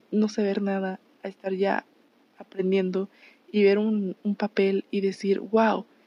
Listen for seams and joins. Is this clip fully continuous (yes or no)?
yes